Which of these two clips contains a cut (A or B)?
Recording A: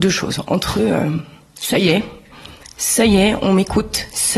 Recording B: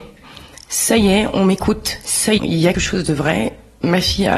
B